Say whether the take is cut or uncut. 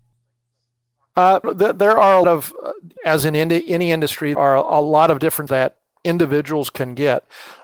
cut